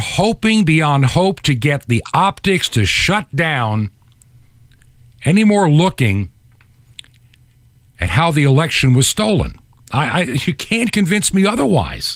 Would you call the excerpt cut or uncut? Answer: uncut